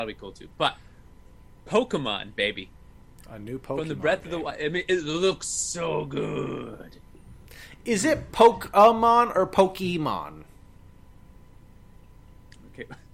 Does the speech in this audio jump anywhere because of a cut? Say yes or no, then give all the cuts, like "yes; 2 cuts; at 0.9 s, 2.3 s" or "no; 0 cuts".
no; 0 cuts